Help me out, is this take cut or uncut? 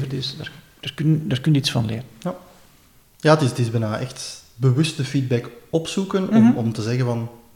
uncut